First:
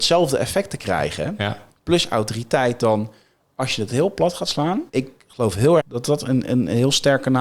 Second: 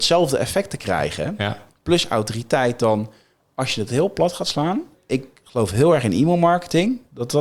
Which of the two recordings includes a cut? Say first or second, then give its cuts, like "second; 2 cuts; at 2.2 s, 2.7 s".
first; 2 cuts; at 4.9 s, 5.8 s